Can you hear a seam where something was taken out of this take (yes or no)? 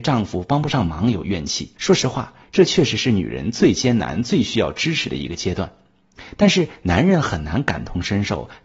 yes